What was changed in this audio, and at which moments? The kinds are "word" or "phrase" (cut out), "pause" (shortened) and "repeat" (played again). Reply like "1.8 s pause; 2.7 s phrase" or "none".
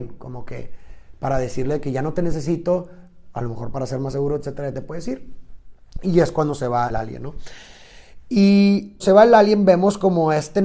6.9 s word; 9.0 s word

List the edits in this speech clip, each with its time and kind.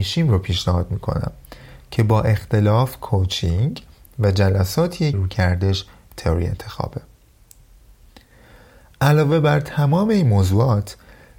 5.1 s word

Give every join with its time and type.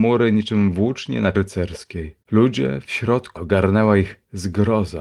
1.3 s word; 2.2 s pause; 3.4 s word

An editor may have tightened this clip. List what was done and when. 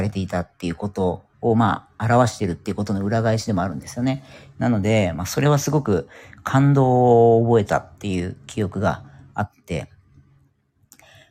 1.3 s pause

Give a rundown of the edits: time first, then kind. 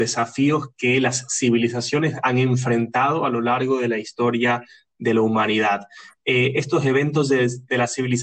none

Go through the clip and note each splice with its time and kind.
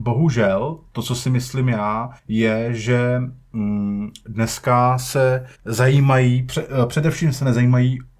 2.2 s pause; 5.5 s pause

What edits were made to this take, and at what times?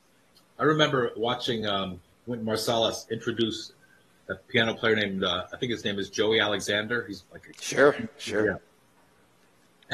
none

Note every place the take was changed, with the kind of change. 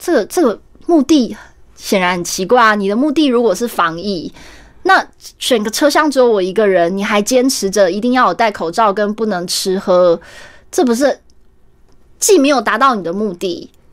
none

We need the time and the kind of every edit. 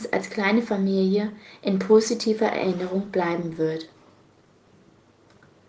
none

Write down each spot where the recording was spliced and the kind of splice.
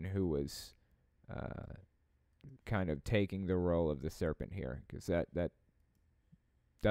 2.6 s pause

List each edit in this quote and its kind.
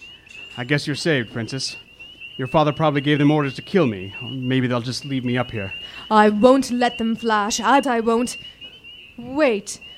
7.8 s word

